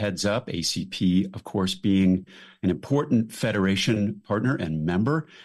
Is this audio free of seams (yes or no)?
yes